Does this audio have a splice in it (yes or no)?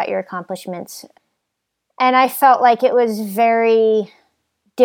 no